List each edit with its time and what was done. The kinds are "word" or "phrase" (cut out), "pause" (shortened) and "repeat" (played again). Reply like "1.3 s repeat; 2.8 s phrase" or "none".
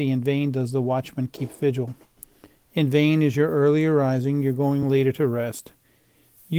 none

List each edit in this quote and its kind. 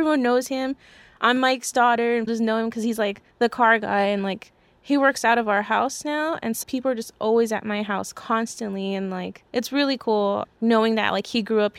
2.3 s word; 3.3 s pause; 6.6 s word; 9.5 s pause

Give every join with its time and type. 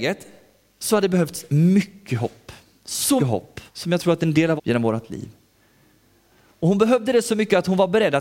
3.2 s word; 3.7 s pause; 4.6 s phrase

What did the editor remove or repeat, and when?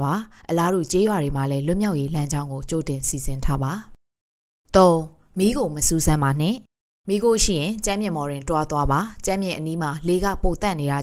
none

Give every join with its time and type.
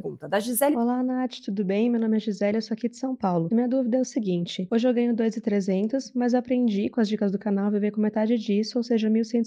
none

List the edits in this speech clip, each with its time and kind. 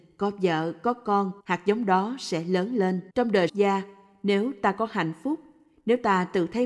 1.4 s pause; 3.1 s pause; 3.5 s phrase

